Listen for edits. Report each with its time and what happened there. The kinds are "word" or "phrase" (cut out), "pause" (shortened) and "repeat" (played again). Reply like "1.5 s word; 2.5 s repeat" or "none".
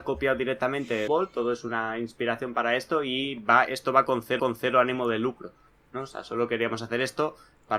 1.1 s word; 4.4 s repeat